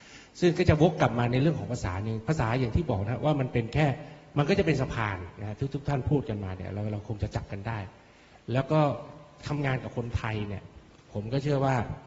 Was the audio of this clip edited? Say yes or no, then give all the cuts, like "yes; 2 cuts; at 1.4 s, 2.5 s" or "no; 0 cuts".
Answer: no; 0 cuts